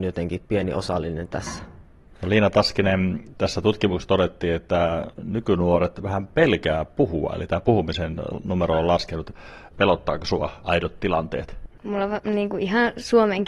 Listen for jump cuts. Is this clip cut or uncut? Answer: uncut